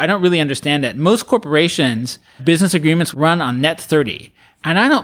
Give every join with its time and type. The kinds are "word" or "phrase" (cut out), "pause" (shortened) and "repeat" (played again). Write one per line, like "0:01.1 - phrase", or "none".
0:02.4 - word
0:03.1 - phrase